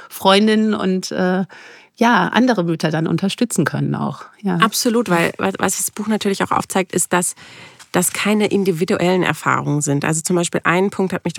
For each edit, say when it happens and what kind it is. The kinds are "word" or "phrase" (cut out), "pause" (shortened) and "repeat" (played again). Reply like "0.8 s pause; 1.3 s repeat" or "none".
none